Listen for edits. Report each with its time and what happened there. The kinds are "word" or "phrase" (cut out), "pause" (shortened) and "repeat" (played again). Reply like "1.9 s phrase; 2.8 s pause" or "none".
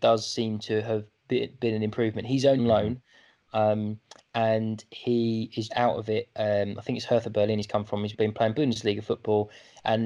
1.6 s word; 2.6 s word; 5.7 s word; 8.1 s word